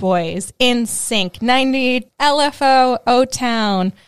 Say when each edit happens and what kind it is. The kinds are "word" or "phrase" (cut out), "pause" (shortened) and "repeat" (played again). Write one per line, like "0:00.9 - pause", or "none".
0:02.1 - word